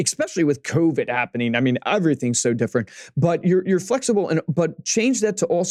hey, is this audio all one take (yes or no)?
yes